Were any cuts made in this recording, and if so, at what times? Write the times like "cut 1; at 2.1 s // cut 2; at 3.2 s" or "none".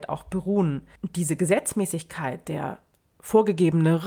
cut 1; at 0.9 s

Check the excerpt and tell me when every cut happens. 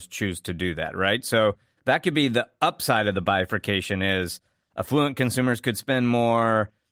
none

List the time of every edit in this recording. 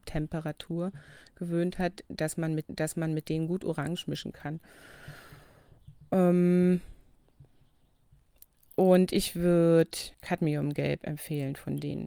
cut 1; at 2.6 s // cut 2; at 10.1 s

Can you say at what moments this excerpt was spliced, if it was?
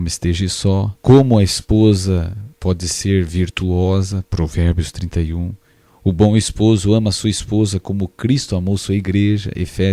cut 1; at 1.0 s // cut 2; at 2.5 s

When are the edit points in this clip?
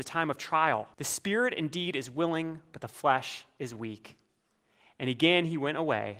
cut 1; at 0.9 s

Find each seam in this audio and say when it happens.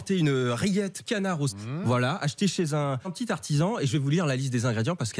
cut 1; at 1.0 s // cut 2; at 1.5 s // cut 3; at 3.0 s

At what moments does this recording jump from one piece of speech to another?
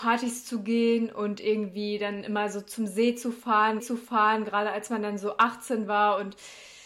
cut 1; at 3.8 s

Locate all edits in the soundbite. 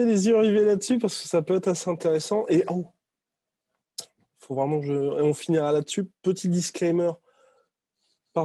none

